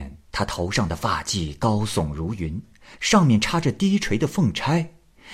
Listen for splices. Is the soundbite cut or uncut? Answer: uncut